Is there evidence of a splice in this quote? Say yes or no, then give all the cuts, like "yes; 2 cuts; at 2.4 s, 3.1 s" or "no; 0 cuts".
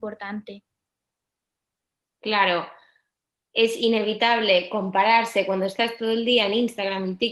no; 0 cuts